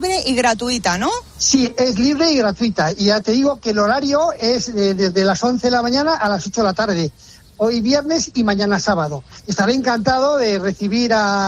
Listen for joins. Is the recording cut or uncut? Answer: uncut